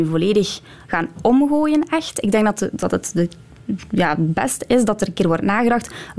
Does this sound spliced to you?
no; 0 cuts

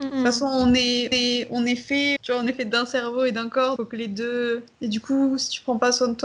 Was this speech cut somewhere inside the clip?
yes; 3 cuts; at 1.1 s, 2.2 s, 3.8 s

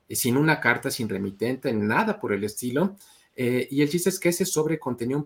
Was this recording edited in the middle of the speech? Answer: no; 0 cuts

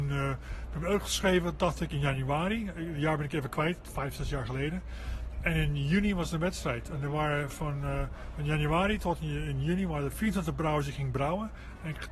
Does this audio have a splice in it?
no; 0 cuts

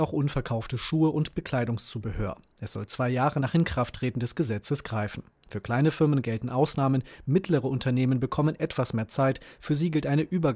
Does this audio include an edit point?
no; 0 cuts

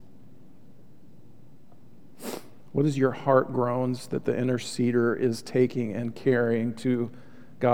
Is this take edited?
no; 0 cuts

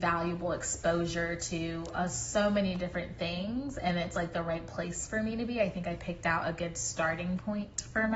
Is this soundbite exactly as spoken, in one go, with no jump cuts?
yes; 0 cuts

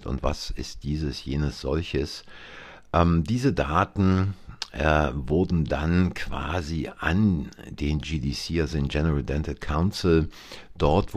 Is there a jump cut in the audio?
no; 0 cuts

